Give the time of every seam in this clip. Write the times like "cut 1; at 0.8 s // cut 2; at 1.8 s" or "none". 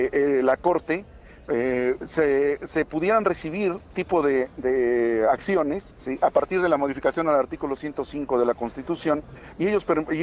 cut 1; at 3.9 s // cut 2; at 5.9 s